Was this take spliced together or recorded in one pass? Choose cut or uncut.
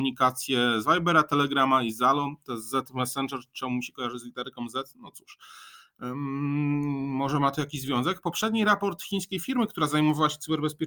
uncut